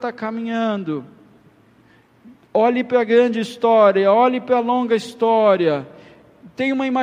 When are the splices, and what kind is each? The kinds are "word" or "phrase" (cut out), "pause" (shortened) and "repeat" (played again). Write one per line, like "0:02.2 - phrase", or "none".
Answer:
none